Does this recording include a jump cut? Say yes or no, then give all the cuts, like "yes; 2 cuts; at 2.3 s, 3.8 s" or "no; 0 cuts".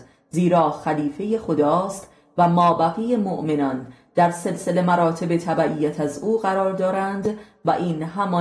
no; 0 cuts